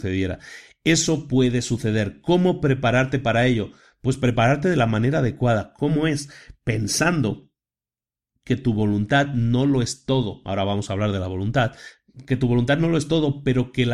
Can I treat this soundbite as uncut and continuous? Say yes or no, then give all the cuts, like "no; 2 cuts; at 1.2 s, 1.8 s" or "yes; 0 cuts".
yes; 0 cuts